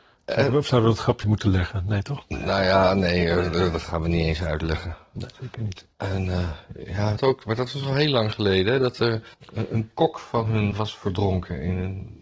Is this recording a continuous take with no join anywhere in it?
no; 6 cuts; at 1.2 s, 5.3 s, 5.9 s, 7.2 s, 9.3 s, 10.7 s

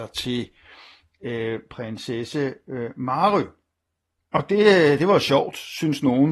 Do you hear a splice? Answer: no; 0 cuts

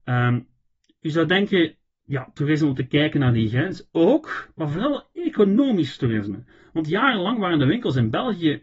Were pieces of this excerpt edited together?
no; 0 cuts

